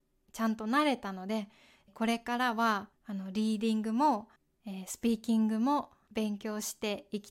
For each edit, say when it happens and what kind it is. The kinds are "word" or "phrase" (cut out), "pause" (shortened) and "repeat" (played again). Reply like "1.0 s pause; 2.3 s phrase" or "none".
2.9 s pause; 4.4 s pause